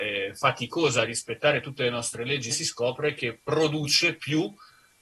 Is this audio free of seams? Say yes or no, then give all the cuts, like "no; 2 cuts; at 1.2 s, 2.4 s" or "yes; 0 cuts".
no; 1 cut; at 2.5 s